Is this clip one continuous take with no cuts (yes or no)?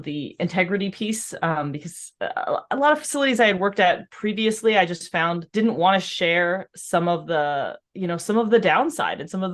no